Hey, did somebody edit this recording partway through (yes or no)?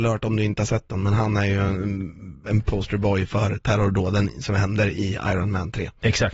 no